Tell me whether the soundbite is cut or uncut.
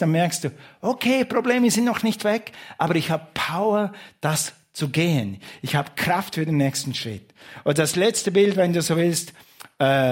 uncut